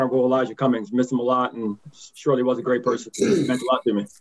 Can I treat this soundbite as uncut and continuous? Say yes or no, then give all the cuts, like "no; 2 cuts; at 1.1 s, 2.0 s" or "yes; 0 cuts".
yes; 0 cuts